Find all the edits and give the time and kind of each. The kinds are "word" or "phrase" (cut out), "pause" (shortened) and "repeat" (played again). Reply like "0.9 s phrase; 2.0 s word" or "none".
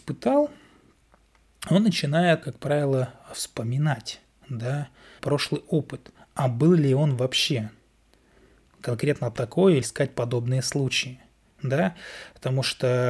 2.4 s word; 5.2 s word; 9.8 s word